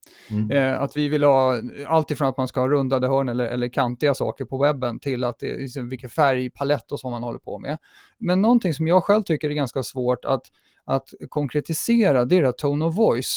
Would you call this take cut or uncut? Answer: uncut